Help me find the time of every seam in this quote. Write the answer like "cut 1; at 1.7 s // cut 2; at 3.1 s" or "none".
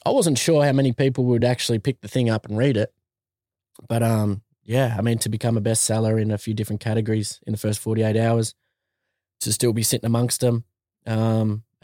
none